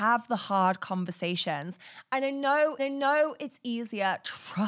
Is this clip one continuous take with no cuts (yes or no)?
no